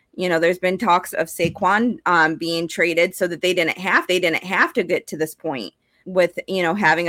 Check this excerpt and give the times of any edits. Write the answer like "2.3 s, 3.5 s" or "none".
1.1 s, 4.1 s, 6.0 s